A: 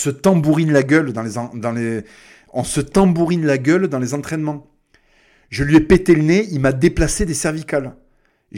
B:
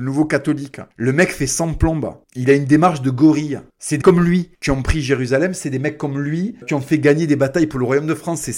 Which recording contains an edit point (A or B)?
B